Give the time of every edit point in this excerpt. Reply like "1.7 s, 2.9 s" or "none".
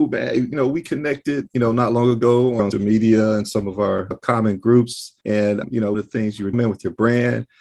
2.7 s, 5.2 s, 5.9 s, 6.5 s